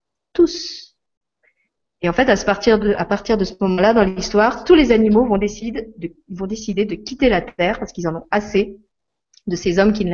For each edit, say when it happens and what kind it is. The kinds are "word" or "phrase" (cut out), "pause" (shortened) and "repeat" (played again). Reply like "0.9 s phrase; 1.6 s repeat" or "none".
none

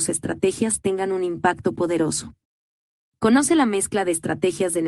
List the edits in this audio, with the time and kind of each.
none

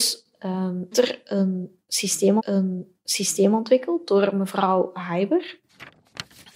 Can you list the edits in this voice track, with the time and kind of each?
0.9 s word; 2.4 s repeat

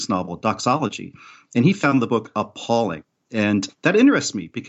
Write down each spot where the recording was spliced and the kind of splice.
none

